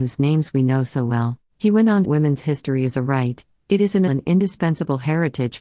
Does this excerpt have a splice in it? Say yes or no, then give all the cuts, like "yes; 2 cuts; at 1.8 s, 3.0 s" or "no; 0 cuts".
yes; 3 cuts; at 1.5 s, 2.0 s, 4.1 s